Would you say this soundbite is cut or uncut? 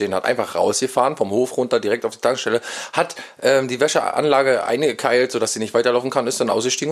uncut